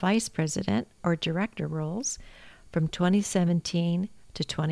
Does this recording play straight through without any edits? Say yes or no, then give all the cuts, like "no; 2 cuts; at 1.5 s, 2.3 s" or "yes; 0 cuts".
yes; 0 cuts